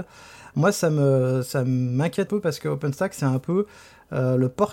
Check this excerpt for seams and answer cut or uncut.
cut